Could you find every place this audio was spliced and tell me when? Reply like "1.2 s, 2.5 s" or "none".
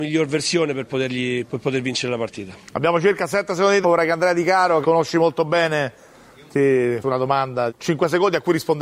3.8 s, 4.8 s, 7.0 s, 7.7 s